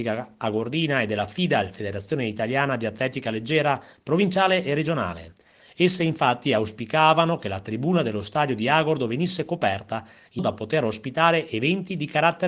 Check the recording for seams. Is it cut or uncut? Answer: cut